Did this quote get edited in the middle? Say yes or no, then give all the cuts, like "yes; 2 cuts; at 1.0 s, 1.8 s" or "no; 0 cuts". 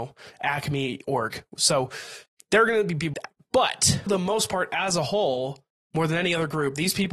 yes; 3 cuts; at 2.3 s, 3.1 s, 4.1 s